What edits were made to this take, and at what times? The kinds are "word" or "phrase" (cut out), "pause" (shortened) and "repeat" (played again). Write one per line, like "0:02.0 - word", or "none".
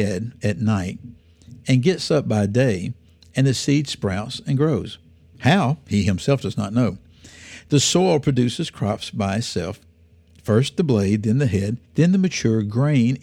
0:11.8 - pause

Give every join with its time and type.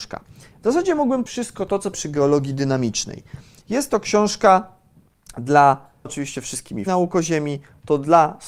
0:01.3 - word
0:01.9 - word
0:06.0 - word
0:06.9 - word

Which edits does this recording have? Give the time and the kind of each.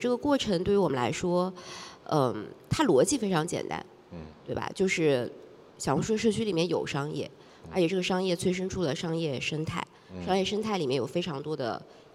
none

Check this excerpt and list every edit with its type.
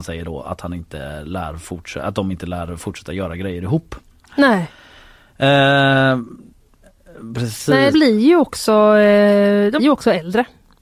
0:07.9 - word
0:09.8 - word

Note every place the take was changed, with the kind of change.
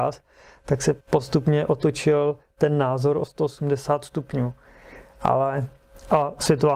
0:01.0 - pause

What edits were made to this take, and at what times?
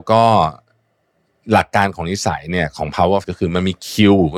0:03.2 - word

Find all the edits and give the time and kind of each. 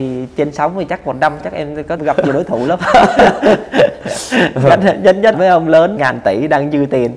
0:01.4 - word
0:02.0 - word
0:05.3 - word
0:06.0 - word

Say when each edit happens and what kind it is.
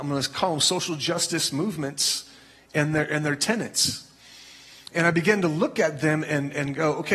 none

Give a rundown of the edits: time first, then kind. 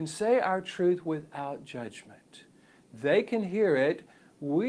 none

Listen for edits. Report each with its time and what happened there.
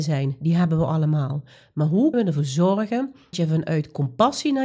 0:02.1 - word
0:03.3 - word

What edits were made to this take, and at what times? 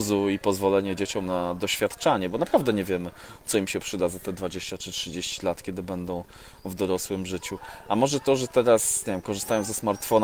none

